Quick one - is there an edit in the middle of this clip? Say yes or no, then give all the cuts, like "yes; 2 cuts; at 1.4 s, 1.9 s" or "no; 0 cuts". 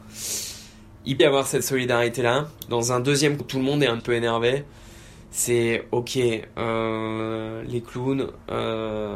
yes; 3 cuts; at 1.2 s, 3.4 s, 4.0 s